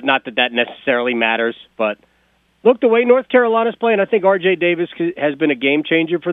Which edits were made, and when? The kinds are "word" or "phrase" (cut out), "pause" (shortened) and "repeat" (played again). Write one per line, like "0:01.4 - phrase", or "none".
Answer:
0:02.4 - word

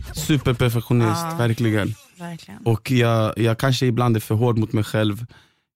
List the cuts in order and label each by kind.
none

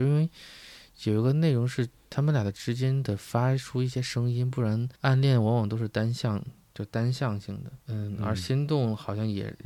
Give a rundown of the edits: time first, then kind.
0:05.0 - pause
0:07.8 - pause

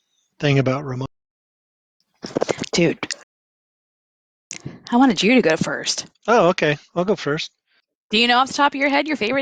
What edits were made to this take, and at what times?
0:06.1 - pause

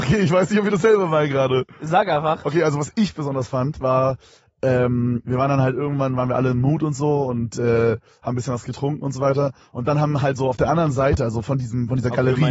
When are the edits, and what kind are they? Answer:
none

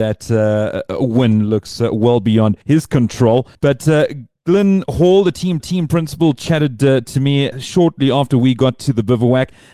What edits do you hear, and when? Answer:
0:02.6 - pause
0:03.5 - pause
0:05.6 - repeat
0:07.5 - word

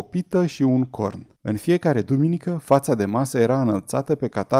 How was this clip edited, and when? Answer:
0:01.4 - pause

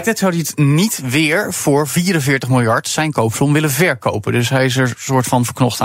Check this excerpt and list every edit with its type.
none

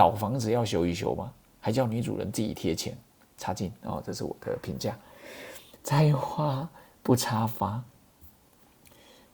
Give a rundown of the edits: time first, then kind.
none

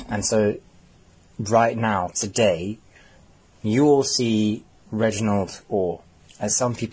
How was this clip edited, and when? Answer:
none

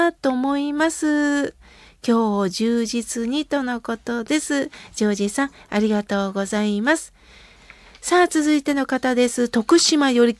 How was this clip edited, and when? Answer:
none

